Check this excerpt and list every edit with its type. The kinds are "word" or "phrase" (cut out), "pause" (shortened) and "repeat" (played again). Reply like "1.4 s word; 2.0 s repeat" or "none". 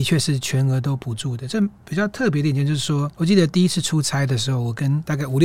3.1 s pause